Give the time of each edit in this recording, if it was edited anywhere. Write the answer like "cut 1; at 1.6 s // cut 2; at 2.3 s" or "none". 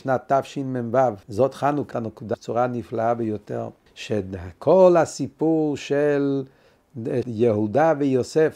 cut 1; at 1.2 s // cut 2; at 1.9 s // cut 3; at 2.3 s // cut 4; at 3.9 s // cut 5; at 7.2 s